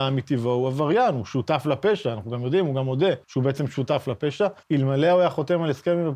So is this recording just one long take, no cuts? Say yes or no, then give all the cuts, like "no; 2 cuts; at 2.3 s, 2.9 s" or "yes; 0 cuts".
no; 2 cuts; at 3.2 s, 4.6 s